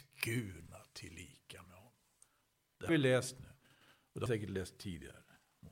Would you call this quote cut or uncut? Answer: cut